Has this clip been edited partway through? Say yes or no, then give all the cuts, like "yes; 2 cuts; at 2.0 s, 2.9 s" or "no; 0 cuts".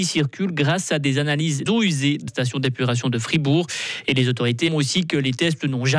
yes; 3 cuts; at 1.7 s, 2.3 s, 4.7 s